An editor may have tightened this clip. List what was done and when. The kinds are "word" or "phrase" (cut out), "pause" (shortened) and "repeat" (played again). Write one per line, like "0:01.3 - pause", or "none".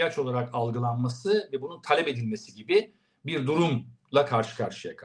none